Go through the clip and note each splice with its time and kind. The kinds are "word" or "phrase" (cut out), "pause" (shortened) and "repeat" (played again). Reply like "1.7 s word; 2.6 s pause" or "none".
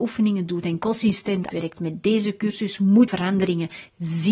1.5 s phrase; 3.1 s word